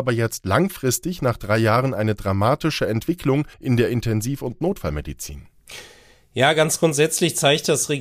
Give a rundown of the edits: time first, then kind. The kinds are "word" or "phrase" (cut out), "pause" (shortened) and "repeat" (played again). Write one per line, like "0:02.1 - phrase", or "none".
0:03.5 - pause